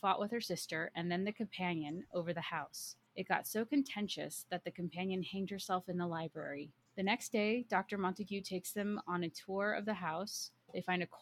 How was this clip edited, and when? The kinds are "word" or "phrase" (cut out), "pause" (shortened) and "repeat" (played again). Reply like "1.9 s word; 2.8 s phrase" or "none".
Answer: 2.3 s phrase